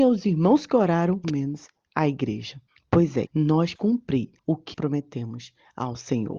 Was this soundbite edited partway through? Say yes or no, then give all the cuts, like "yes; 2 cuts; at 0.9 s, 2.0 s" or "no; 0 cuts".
yes; 6 cuts; at 1.2 s, 2.7 s, 3.3 s, 3.8 s, 4.4 s, 4.7 s